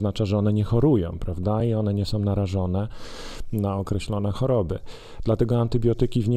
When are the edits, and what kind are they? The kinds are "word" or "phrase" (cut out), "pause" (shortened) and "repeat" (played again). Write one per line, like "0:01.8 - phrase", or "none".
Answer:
none